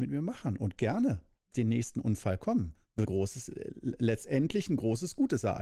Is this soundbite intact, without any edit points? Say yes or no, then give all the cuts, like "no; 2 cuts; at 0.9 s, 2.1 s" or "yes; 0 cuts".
no; 2 cuts; at 1.5 s, 3.1 s